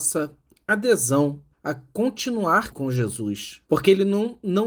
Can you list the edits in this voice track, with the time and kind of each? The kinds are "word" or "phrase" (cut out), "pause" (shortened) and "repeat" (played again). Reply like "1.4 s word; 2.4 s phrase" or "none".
1.5 s pause; 2.7 s word; 3.7 s pause